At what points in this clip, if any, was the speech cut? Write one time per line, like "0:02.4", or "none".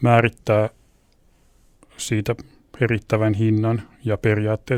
none